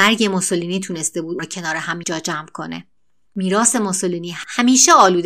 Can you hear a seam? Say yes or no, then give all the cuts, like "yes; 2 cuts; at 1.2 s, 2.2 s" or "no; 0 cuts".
yes; 2 cuts; at 1.4 s, 2.0 s